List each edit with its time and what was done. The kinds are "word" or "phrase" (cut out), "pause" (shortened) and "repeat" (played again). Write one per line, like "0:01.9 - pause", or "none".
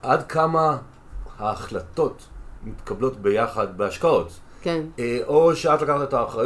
none